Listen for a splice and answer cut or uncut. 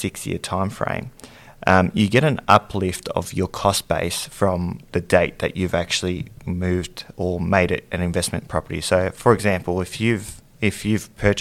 uncut